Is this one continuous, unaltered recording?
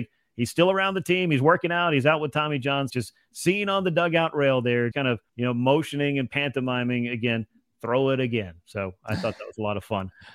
no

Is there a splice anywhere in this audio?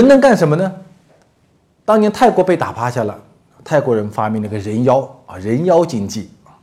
no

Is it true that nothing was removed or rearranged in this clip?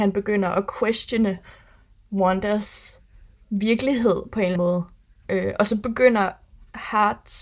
no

